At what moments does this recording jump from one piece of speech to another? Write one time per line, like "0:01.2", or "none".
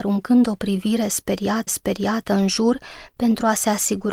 0:01.7